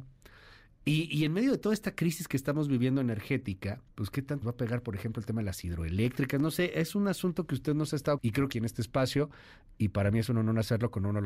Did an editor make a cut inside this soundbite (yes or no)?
yes